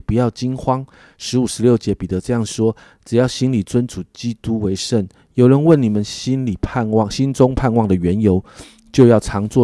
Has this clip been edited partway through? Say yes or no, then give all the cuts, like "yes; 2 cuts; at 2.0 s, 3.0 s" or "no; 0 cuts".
no; 0 cuts